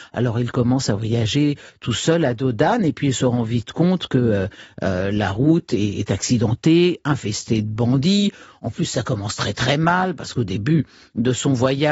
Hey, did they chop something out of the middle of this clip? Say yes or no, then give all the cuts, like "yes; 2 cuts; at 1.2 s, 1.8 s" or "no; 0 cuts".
no; 0 cuts